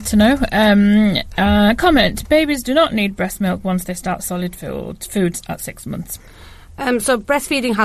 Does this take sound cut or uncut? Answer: uncut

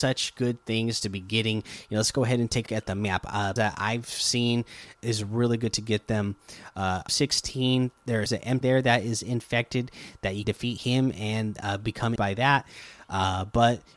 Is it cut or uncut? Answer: cut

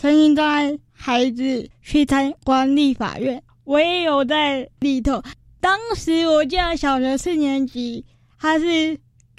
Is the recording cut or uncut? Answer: uncut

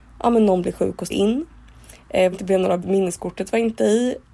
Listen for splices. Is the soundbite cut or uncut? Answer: cut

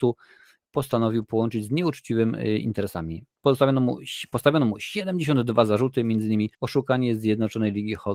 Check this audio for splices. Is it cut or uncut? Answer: cut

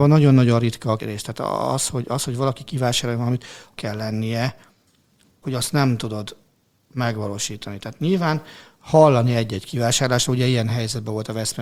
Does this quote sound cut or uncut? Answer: cut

